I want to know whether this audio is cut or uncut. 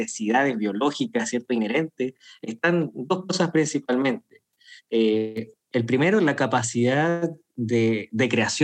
uncut